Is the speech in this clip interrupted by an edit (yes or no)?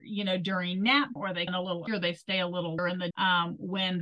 yes